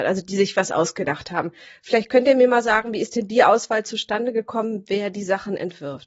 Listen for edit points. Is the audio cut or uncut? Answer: uncut